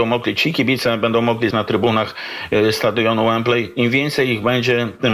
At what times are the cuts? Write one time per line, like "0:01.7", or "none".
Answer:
0:01.5